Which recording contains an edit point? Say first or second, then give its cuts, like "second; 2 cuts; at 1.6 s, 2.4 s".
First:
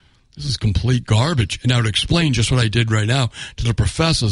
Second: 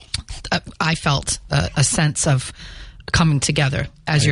second; 1 cut; at 1.5 s